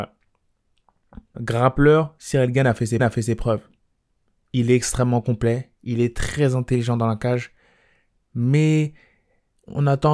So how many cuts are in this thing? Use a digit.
2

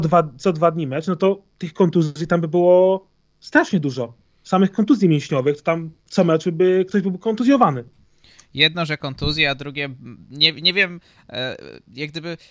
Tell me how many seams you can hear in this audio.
1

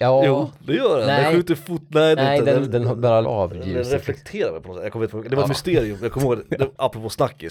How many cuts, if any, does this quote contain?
5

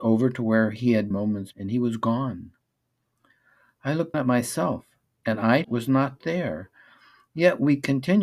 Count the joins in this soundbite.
4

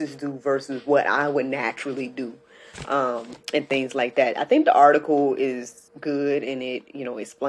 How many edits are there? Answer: 2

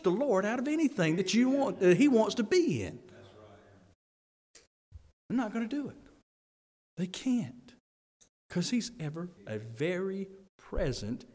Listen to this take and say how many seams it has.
1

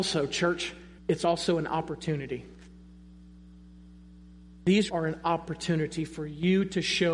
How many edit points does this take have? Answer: 2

